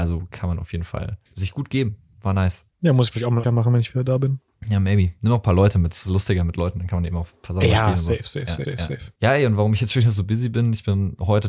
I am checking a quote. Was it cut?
yes; 5 cuts; at 1.3 s, 2.7 s, 3.4 s, 8.6 s, 9.2 s

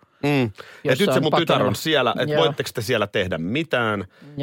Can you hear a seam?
no; 0 cuts

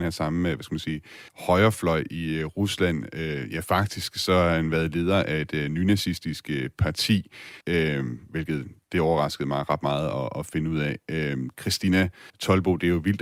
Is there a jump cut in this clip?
yes; 3 cuts; at 1.3 s, 7.6 s, 12.3 s

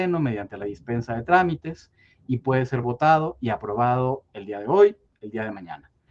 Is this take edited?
no; 0 cuts

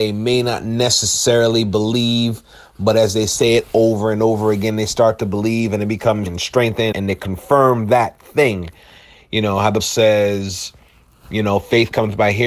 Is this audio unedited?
no; 3 cuts; at 6.3 s, 6.9 s, 9.8 s

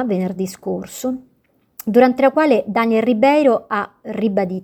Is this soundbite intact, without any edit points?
yes; 0 cuts

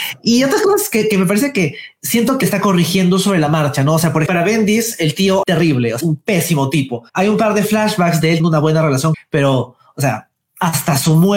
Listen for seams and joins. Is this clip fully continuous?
no; 7 cuts; at 2.4 s, 4.3 s, 5.4 s, 6.0 s, 7.1 s, 8.4 s, 9.1 s

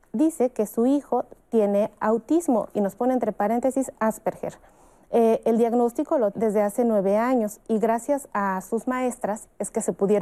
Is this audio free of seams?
no; 1 cut; at 6.3 s

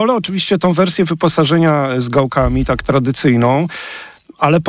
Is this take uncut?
yes; 0 cuts

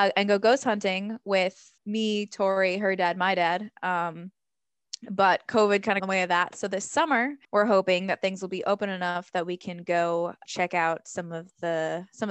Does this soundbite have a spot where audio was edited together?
yes; 4 cuts; at 1.8 s, 6.0 s, 7.4 s, 10.5 s

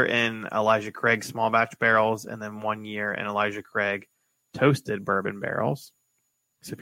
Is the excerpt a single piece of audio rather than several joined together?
yes; 0 cuts

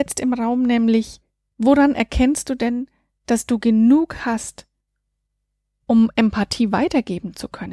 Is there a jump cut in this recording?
no; 0 cuts

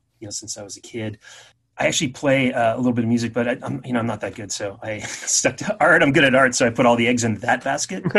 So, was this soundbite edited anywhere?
yes; 1 cut; at 1.5 s

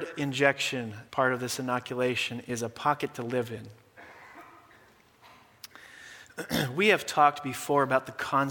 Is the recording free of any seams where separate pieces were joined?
no; 1 cut; at 1.1 s

